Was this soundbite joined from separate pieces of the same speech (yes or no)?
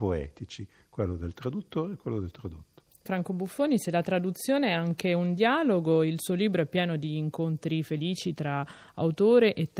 yes